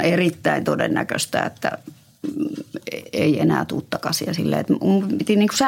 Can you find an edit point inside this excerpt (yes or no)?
no